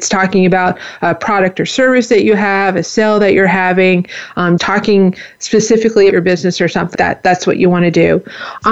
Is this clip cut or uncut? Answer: cut